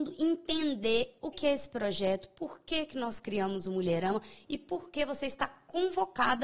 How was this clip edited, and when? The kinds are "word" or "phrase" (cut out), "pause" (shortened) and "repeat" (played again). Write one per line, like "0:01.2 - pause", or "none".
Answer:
0:01.3 - word